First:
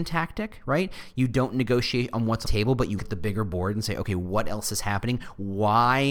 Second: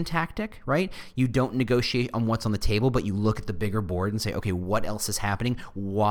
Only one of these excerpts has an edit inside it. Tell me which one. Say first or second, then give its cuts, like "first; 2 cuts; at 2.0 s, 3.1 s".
first; 2 cuts; at 2.4 s, 3.0 s